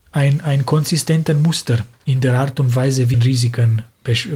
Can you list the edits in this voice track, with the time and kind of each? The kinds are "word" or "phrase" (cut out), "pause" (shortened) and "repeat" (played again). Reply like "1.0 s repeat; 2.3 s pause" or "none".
3.1 s word